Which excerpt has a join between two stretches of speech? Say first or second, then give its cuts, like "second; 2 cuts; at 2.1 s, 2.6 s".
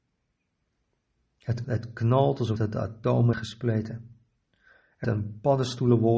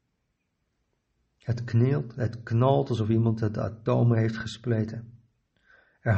first; 4 cuts; at 1.6 s, 2.6 s, 3.3 s, 5.0 s